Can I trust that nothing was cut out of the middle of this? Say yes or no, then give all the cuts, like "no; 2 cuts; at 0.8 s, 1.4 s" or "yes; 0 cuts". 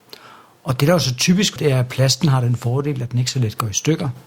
no; 1 cut; at 1.6 s